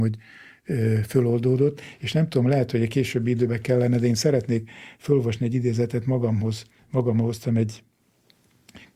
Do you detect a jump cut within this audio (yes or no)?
yes